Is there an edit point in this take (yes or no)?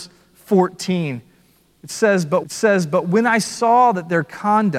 yes